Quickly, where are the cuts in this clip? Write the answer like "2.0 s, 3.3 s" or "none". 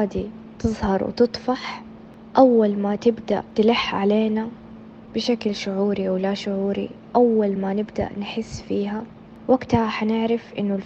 none